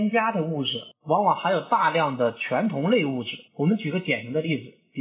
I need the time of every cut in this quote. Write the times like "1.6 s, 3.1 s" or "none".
3.5 s